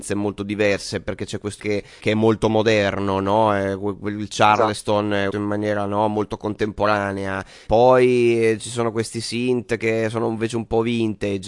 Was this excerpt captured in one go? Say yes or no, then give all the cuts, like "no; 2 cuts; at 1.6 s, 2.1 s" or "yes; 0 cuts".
no; 4 cuts; at 1.6 s, 2.0 s, 5.3 s, 7.7 s